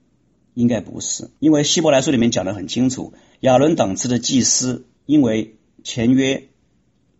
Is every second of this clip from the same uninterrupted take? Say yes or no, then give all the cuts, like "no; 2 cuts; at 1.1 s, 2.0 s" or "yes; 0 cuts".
no; 3 cuts; at 1.4 s, 3.3 s, 4.9 s